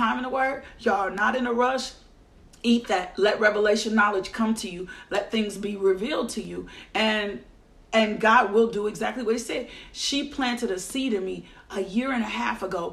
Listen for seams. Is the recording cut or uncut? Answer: uncut